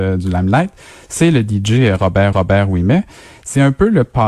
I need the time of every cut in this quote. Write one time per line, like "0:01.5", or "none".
0:02.3

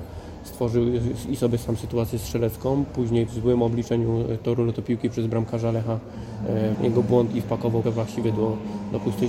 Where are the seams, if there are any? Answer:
0:03.3
0:06.7
0:07.8

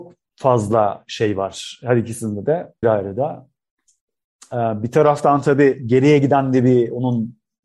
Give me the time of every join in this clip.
0:02.8

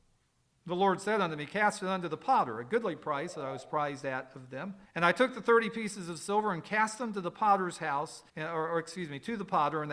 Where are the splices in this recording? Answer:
0:04.9
0:08.3

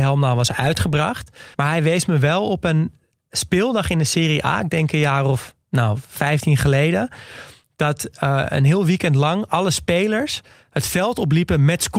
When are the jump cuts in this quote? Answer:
0:01.5

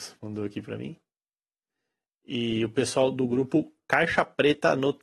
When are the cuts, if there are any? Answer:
none

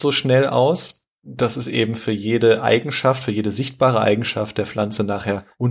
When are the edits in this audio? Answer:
0:01.1

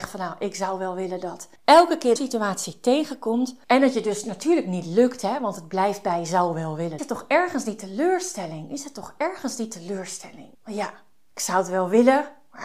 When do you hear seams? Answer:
0:01.6
0:02.2
0:07.0
0:10.5

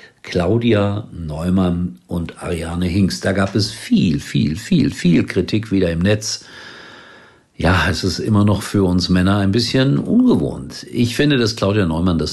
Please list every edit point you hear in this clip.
none

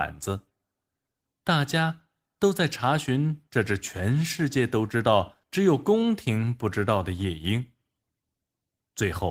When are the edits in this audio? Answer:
0:05.4

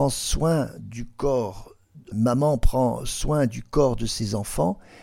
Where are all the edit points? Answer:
0:02.1

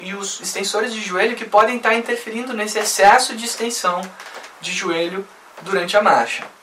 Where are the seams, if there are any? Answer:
none

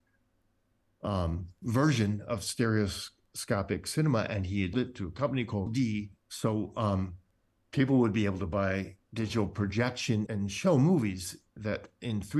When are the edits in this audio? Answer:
0:04.7
0:05.7
0:06.2
0:09.0
0:10.3

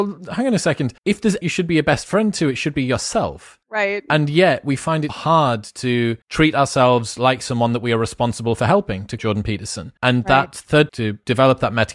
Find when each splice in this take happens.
0:01.0
0:01.4
0:03.6
0:05.1
0:06.2
0:09.2
0:10.0
0:10.9

